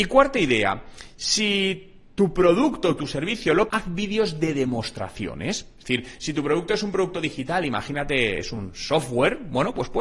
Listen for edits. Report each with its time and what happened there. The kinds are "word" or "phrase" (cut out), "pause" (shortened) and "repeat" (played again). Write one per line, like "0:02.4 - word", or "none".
0:03.7 - word